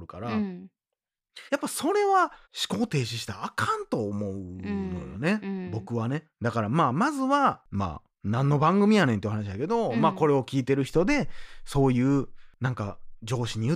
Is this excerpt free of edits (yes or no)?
no